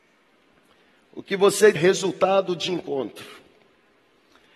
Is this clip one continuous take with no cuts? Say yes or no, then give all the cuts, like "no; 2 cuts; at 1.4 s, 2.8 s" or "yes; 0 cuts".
no; 2 cuts; at 1.8 s, 2.7 s